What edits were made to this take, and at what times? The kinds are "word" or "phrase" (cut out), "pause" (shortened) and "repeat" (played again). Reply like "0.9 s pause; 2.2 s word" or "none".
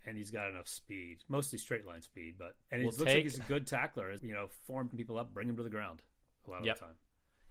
2.6 s pause; 4.2 s word; 4.9 s phrase